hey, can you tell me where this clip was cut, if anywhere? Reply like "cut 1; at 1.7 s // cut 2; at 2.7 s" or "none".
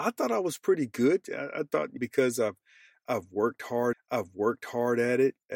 cut 1; at 2.0 s // cut 2; at 3.9 s